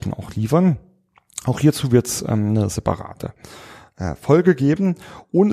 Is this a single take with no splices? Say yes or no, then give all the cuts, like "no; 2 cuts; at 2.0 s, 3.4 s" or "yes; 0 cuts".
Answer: yes; 0 cuts